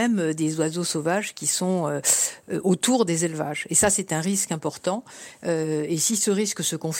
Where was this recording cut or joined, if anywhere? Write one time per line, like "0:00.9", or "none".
none